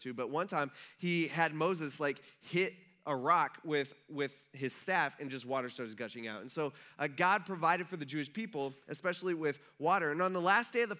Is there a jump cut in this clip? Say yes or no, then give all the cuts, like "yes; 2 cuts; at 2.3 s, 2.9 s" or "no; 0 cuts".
no; 0 cuts